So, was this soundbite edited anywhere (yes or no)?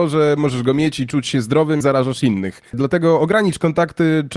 yes